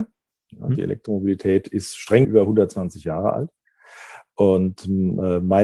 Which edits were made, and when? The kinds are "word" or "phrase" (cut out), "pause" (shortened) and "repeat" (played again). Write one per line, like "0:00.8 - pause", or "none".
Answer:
0:02.2 - word